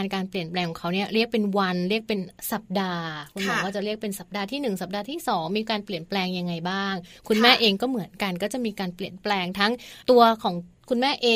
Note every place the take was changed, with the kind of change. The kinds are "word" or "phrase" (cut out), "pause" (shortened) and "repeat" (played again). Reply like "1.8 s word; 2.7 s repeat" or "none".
10.0 s pause